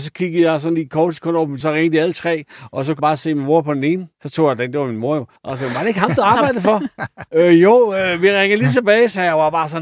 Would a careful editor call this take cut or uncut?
cut